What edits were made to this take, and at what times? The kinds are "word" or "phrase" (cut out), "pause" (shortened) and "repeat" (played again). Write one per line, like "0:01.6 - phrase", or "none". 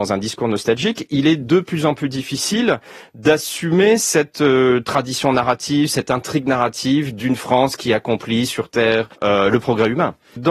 0:09.1 - pause